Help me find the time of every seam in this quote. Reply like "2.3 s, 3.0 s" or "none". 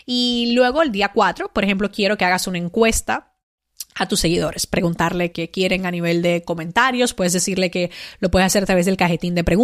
5.3 s